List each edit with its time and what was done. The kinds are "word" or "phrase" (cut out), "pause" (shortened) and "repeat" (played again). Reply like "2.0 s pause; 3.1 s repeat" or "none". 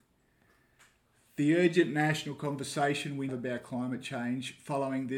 3.3 s phrase